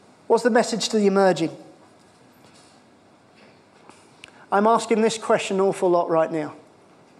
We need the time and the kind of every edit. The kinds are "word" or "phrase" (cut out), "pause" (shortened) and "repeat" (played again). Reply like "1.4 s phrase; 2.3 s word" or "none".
none